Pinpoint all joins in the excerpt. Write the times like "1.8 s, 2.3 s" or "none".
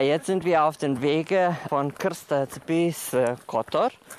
none